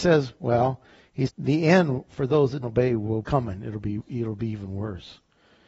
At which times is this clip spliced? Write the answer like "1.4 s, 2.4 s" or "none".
1.3 s, 2.6 s, 3.2 s